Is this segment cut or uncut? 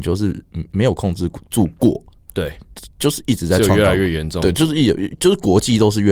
uncut